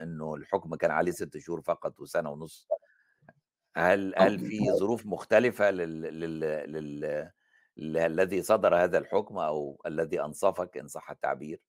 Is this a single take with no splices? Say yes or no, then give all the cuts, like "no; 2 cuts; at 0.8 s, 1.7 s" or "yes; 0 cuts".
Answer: yes; 0 cuts